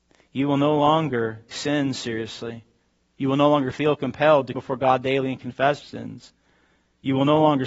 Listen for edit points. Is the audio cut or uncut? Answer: cut